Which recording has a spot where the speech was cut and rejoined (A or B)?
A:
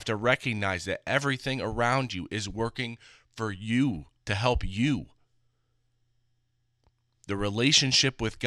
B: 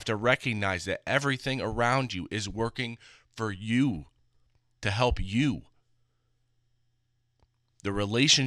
A